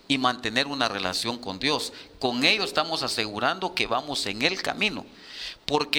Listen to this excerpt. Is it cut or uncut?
uncut